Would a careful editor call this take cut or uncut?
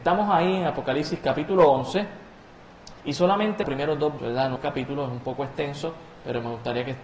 cut